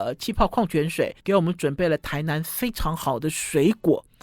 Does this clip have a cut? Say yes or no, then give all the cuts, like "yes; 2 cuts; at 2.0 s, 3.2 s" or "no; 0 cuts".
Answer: yes; 1 cut; at 1.2 s